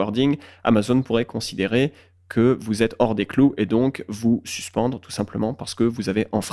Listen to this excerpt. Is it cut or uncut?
uncut